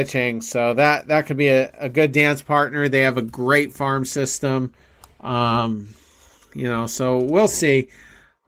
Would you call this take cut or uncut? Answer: uncut